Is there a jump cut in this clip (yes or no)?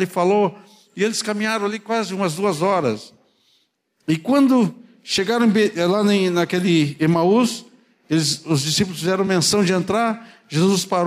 no